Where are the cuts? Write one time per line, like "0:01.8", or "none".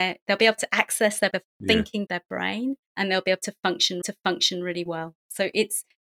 0:01.3
0:02.1
0:02.8
0:04.0